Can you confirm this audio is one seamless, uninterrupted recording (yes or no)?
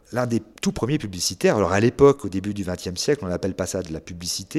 yes